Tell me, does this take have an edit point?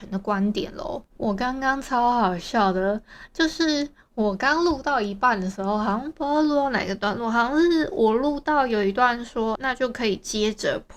yes; 1 cut; at 9.5 s

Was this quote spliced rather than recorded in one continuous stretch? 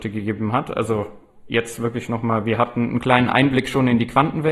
no; 0 cuts

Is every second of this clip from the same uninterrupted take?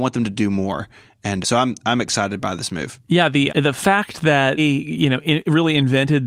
no; 3 cuts; at 1.4 s, 3.5 s, 4.6 s

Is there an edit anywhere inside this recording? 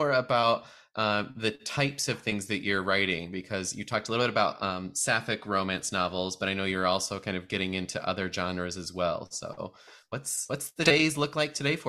no; 0 cuts

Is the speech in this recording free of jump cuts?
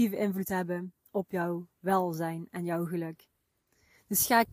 yes; 0 cuts

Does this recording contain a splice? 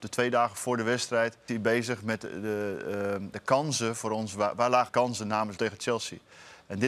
yes; 4 cuts; at 1.5 s, 3.3 s, 4.9 s, 5.6 s

